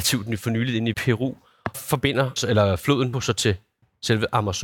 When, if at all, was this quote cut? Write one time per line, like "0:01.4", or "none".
0:00.9
0:01.7
0:02.4
0:03.1